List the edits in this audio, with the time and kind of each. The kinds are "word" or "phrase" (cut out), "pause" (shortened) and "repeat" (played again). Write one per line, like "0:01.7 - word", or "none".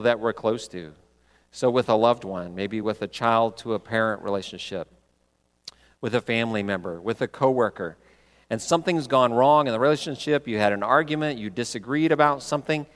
none